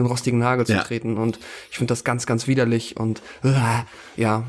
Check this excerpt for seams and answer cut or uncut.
uncut